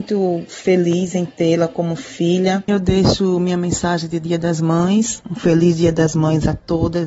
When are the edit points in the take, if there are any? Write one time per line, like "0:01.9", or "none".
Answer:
0:02.7

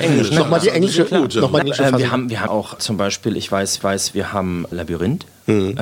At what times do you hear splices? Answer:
0:01.6
0:02.5
0:02.8
0:03.8
0:04.7

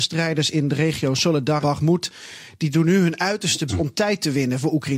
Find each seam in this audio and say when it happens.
0:01.6
0:03.7

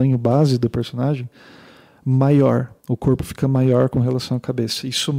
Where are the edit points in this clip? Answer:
0:02.8

